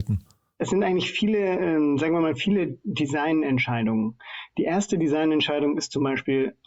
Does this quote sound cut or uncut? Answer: uncut